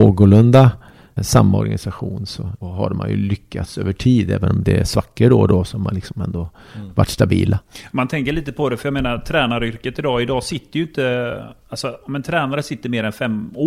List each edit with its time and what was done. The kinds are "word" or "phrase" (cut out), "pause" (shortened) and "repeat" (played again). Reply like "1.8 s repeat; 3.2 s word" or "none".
1.2 s word; 2.6 s word

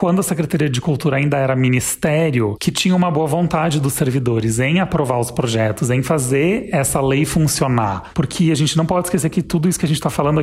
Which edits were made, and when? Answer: none

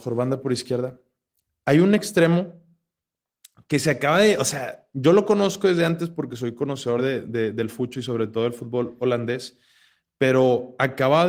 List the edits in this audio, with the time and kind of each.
none

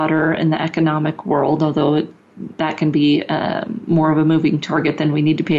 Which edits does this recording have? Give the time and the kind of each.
none

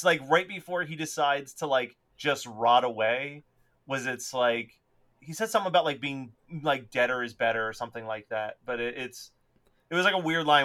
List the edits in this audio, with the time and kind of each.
none

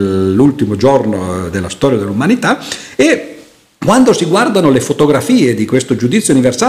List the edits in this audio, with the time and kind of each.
none

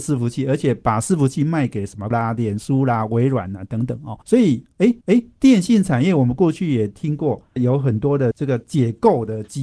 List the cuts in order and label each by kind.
2.1 s word; 4.2 s pause; 5.0 s repeat

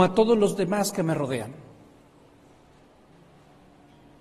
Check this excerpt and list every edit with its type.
none

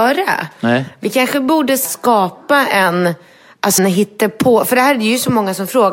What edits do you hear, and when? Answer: 1.8 s word; 3.8 s word

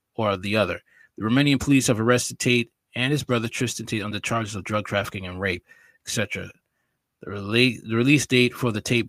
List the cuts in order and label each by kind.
none

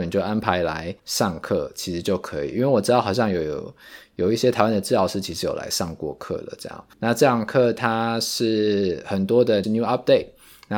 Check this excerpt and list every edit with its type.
1.0 s word; 6.9 s pause; 9.6 s phrase

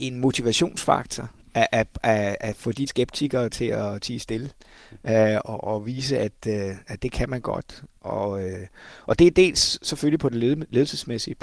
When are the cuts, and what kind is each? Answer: 2.9 s word

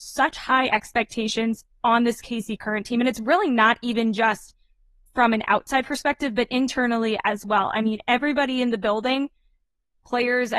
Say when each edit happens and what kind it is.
none

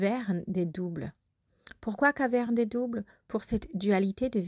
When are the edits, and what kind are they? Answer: none

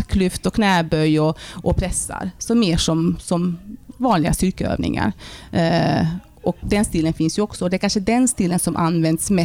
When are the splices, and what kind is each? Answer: 6.6 s word

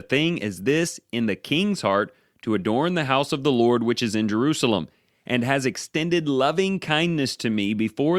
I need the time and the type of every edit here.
none

